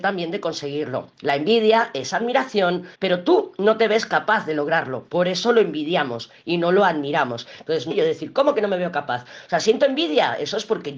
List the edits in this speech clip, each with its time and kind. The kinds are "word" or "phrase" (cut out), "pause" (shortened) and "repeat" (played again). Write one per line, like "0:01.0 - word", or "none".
0:02.9 - pause
0:07.9 - phrase